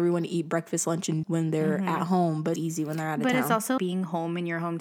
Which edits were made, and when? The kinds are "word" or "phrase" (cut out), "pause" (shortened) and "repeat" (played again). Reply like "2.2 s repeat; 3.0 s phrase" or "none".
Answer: 1.2 s word; 2.6 s word; 3.8 s word

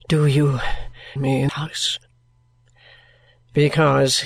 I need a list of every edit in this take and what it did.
1.2 s word; 1.5 s word

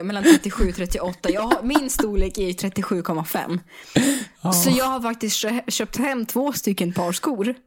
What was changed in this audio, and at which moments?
none

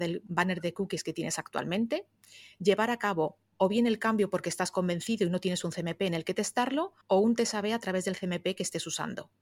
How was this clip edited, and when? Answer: 7.0 s pause

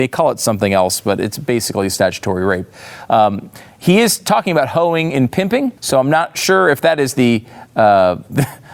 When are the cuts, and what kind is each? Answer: 5.8 s pause

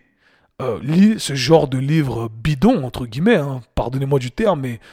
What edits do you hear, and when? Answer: none

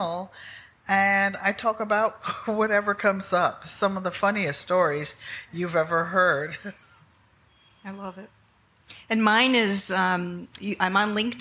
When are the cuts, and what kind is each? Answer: none

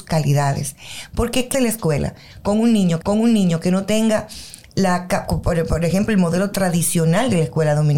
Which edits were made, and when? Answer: 1.5 s word; 3.0 s repeat

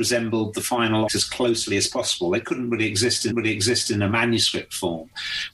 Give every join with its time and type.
1.1 s word; 3.3 s repeat

